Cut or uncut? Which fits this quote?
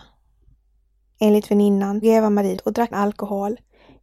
cut